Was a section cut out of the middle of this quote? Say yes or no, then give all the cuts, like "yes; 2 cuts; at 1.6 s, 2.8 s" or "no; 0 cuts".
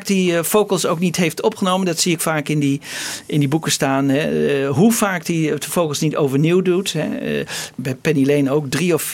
yes; 1 cut; at 2.2 s